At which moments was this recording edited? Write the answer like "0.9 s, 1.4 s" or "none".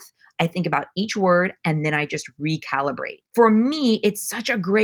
3.3 s